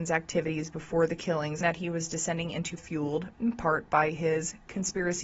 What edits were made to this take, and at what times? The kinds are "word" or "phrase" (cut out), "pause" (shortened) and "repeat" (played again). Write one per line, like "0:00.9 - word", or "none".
0:01.6 - word
0:02.8 - word
0:03.3 - pause